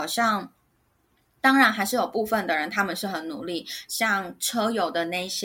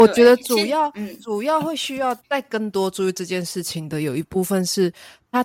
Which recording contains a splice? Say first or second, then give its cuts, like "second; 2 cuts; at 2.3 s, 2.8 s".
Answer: second; 1 cut; at 2.2 s